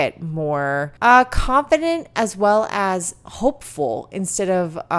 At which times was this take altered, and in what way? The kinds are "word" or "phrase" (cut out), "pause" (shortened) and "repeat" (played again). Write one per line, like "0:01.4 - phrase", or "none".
0:01.0 - pause